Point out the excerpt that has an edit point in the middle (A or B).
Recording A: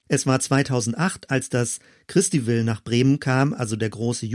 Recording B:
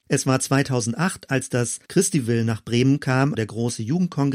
B